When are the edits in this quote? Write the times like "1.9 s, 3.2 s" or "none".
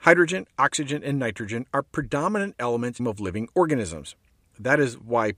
3.0 s